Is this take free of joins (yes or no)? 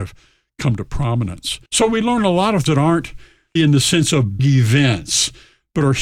no